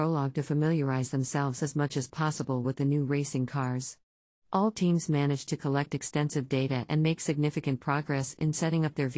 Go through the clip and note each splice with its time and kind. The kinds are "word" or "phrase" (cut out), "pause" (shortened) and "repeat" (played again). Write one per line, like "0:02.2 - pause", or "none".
none